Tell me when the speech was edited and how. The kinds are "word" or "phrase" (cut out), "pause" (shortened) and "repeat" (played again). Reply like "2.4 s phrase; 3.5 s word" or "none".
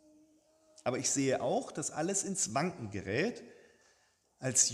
none